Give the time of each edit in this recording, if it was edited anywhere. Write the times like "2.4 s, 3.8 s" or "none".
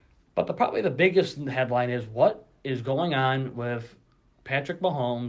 none